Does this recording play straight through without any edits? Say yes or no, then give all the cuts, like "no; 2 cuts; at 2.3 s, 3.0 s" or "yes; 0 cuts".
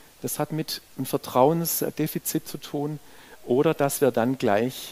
yes; 0 cuts